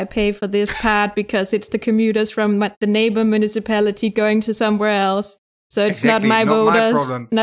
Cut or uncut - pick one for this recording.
uncut